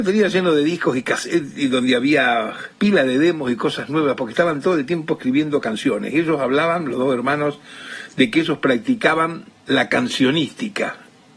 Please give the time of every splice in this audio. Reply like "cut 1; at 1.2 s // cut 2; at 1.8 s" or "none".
cut 1; at 2.7 s // cut 2; at 9.5 s